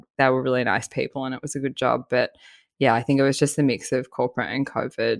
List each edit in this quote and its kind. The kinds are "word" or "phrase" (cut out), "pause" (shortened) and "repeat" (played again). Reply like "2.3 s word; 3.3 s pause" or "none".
none